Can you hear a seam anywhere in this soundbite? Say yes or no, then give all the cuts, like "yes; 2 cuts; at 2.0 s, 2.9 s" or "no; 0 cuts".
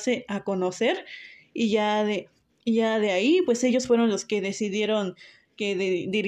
no; 0 cuts